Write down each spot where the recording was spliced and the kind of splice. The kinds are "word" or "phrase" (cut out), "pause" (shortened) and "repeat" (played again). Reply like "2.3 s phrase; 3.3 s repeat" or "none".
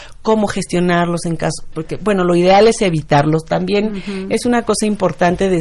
none

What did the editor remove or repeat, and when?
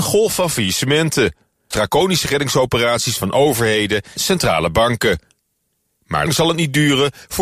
1.7 s word; 4.2 s word; 6.3 s word

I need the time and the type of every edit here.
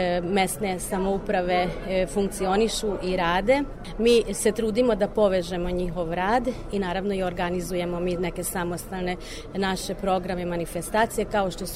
none

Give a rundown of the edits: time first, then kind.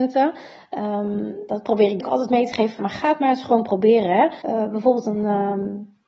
2.0 s word; 2.8 s word; 4.4 s pause

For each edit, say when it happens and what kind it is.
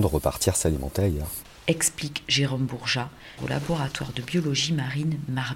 3.4 s word

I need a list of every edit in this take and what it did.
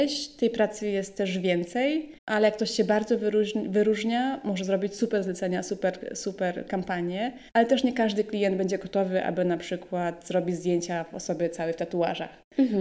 2.2 s pause; 7.5 s pause

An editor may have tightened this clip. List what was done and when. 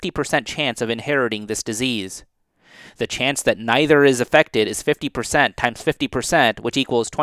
none

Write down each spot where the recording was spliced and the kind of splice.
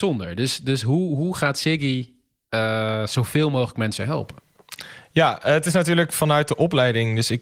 none

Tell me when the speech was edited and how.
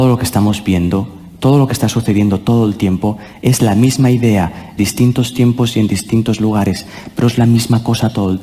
4.8 s phrase

